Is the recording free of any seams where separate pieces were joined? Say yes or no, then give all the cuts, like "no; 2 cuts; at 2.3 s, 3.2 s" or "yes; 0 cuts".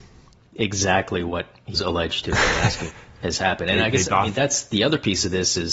no; 2 cuts; at 1.7 s, 2.9 s